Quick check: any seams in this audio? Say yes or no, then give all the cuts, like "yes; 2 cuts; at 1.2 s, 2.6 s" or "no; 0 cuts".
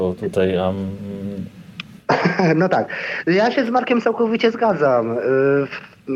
no; 0 cuts